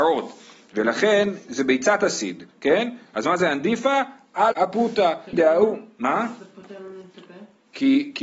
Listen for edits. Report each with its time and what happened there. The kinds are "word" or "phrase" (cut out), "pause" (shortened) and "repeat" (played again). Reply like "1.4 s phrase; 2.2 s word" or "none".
2.5 s pause; 4.5 s word; 5.3 s word

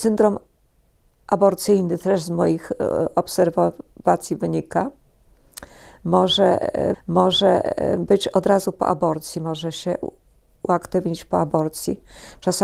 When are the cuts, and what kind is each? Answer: 6.9 s repeat

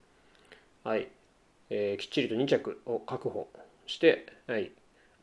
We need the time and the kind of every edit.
none

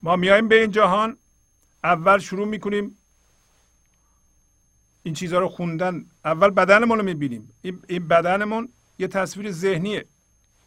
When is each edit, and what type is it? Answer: none

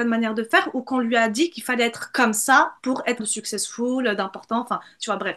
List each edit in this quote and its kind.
3.2 s word

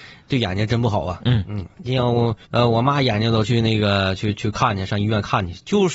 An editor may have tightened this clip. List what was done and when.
2.4 s pause

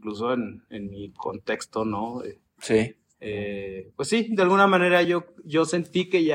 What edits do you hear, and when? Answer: none

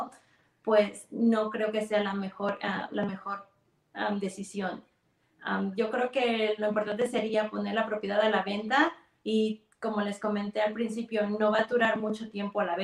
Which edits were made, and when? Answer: none

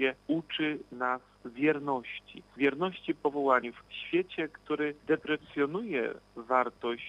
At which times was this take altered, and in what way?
none

